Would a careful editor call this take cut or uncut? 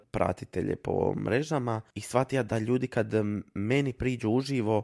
uncut